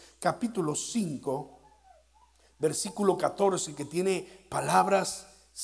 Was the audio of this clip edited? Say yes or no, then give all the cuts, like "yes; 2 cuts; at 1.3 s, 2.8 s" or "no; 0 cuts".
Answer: no; 0 cuts